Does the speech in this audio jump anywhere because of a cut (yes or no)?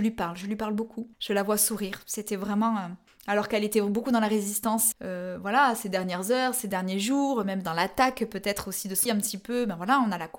yes